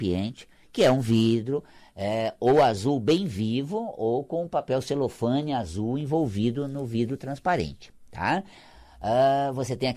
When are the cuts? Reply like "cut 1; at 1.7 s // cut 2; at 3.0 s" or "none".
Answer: none